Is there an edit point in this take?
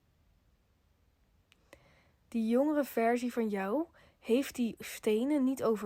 no; 0 cuts

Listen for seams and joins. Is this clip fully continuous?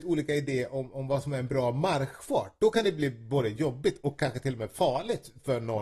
yes; 0 cuts

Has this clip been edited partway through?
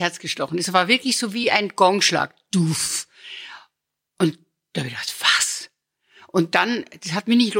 no; 0 cuts

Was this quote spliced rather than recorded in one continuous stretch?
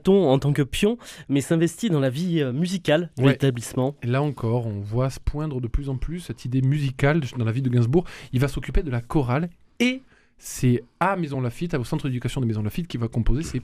no; 0 cuts

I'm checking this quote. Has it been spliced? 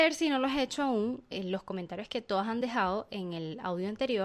no; 0 cuts

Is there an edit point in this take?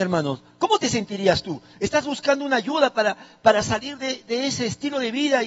no; 0 cuts

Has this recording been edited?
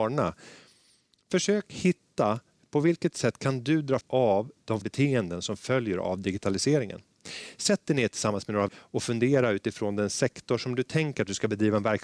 yes; 3 cuts; at 4.0 s, 4.8 s, 8.7 s

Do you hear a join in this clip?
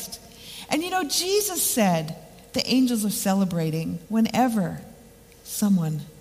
yes; 1 cut; at 4.0 s

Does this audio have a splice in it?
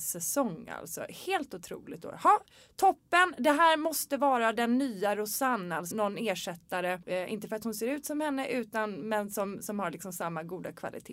yes; 1 cut; at 5.9 s

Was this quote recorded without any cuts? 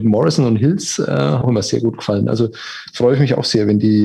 no; 1 cut; at 1.4 s

